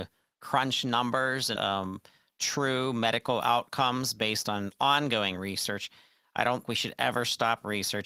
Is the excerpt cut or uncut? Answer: cut